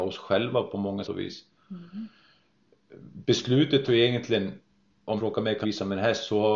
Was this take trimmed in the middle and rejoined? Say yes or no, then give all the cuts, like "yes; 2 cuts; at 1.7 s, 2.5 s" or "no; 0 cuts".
yes; 4 cuts; at 1.0 s, 3.9 s, 5.2 s, 5.6 s